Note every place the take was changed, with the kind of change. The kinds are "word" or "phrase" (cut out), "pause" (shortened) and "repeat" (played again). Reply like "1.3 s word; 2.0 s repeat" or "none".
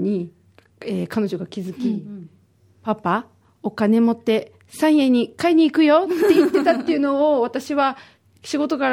none